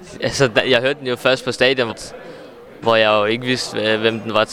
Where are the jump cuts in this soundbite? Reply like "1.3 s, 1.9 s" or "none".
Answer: 1.9 s